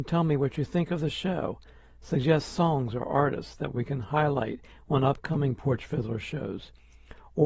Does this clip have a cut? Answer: no; 0 cuts

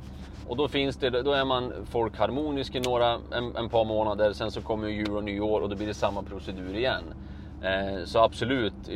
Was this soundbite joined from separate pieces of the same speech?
no; 0 cuts

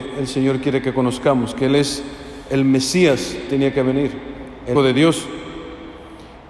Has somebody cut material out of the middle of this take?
yes; 2 cuts; at 3.5 s, 4.7 s

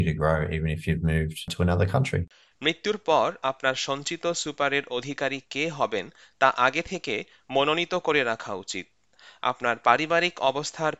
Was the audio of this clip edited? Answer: no; 0 cuts

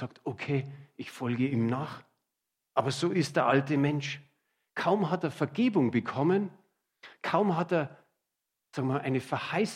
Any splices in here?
no; 0 cuts

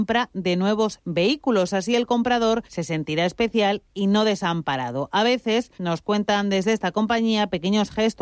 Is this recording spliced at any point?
yes; 2 cuts; at 2.7 s, 5.7 s

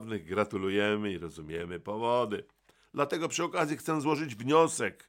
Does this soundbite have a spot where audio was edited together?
no; 0 cuts

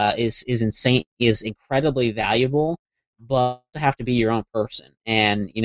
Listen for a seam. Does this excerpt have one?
yes; 2 cuts; at 1.1 s, 3.7 s

